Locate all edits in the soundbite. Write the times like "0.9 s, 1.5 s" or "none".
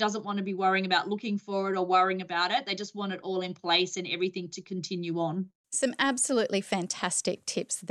none